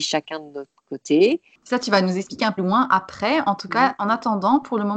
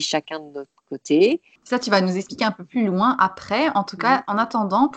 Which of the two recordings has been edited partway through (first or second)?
first